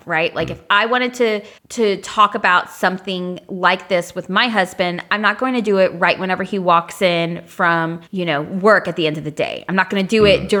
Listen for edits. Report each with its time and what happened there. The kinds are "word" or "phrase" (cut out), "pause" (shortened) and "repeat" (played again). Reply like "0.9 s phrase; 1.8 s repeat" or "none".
1.6 s pause; 8.1 s pause